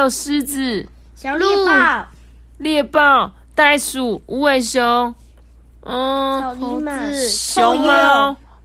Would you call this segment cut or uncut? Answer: uncut